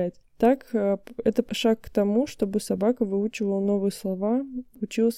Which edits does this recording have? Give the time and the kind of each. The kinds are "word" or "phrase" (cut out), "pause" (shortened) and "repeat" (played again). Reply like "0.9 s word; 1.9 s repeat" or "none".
1.5 s word